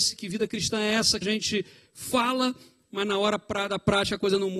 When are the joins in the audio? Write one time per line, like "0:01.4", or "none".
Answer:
0:01.2